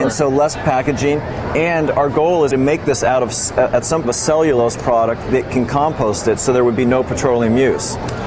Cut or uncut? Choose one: cut